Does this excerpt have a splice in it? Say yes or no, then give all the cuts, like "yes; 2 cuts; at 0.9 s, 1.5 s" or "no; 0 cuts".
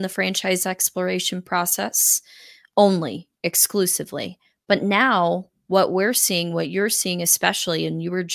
no; 0 cuts